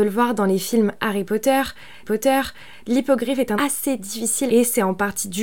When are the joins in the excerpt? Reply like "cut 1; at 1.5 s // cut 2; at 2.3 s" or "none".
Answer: cut 1; at 2.0 s // cut 2; at 3.5 s // cut 3; at 4.5 s